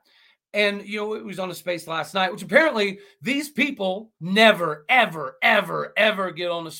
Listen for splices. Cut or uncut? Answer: cut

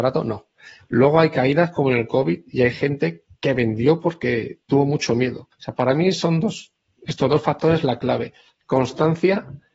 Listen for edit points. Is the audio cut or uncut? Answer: cut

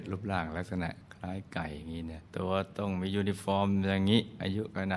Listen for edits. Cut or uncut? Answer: cut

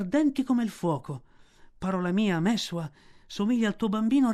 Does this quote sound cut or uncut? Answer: uncut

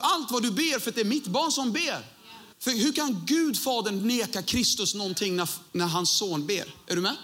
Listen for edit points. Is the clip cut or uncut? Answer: cut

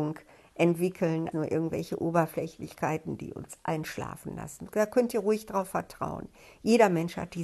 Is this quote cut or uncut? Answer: cut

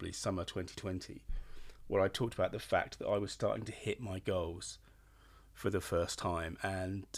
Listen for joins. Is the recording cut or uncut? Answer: uncut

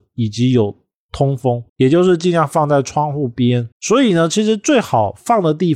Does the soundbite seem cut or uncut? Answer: cut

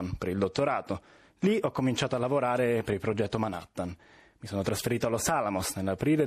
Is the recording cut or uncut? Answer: uncut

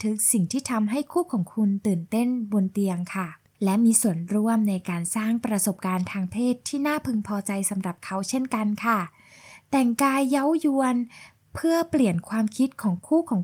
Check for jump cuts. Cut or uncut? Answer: uncut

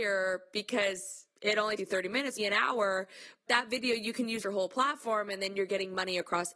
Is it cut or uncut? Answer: cut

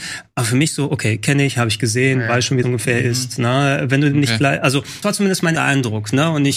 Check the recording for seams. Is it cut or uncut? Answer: cut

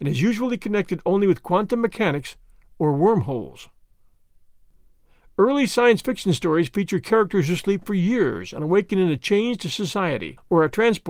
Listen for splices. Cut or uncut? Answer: uncut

